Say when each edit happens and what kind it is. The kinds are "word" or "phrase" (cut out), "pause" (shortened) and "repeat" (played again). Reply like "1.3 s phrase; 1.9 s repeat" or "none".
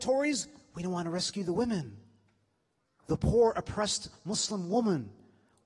none